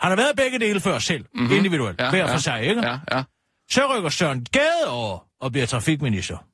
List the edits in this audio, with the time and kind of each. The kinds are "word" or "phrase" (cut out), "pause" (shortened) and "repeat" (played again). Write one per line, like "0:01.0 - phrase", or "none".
none